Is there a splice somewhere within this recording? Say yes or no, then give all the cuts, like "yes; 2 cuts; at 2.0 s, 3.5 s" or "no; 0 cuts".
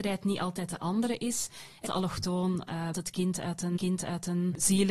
yes; 3 cuts; at 1.8 s, 2.9 s, 3.8 s